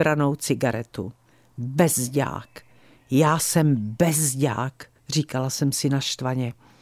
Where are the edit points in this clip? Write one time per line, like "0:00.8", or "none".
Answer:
0:01.3